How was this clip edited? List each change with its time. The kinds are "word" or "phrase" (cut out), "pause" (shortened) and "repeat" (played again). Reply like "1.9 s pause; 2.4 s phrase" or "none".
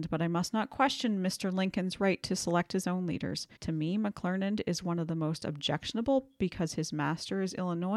3.6 s pause